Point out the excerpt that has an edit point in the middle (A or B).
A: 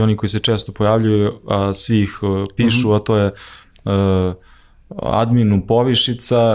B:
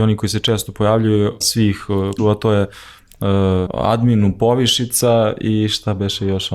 B